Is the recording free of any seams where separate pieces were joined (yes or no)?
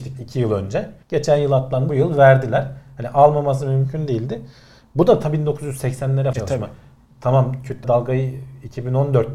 no